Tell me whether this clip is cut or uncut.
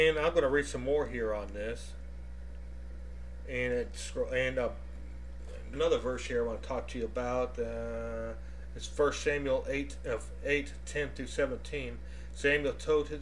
cut